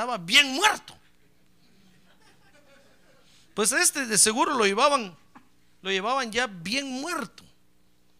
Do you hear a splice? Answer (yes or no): no